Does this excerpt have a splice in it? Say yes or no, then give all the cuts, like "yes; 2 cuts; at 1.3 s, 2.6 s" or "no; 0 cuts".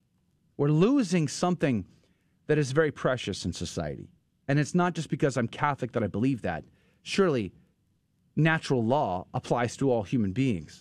no; 0 cuts